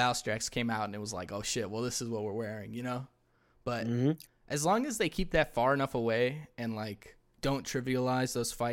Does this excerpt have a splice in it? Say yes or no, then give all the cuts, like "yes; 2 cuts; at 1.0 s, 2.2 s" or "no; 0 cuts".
no; 0 cuts